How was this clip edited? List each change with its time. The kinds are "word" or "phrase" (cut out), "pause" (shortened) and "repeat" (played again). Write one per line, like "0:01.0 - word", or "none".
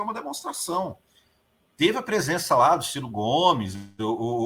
none